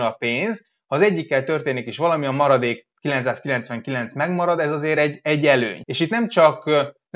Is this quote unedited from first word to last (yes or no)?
yes